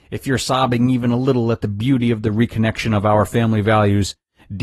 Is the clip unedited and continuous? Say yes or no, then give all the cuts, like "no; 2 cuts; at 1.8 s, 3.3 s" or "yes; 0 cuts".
yes; 0 cuts